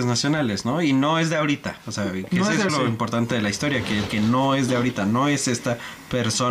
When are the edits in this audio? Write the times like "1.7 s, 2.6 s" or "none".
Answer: 2.7 s, 4.1 s